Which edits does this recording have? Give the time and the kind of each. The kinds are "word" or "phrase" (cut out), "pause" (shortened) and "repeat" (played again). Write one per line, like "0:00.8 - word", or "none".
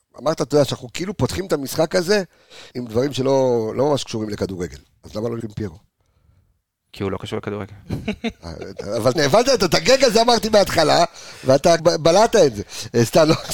0:02.7 - word
0:05.4 - word
0:09.1 - word
0:11.8 - word